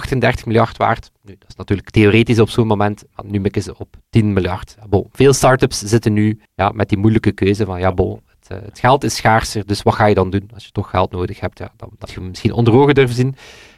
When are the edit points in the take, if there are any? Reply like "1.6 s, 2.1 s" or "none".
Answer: 6.5 s, 12.1 s